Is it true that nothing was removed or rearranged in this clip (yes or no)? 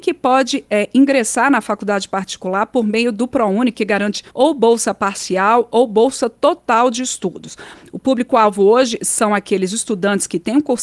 no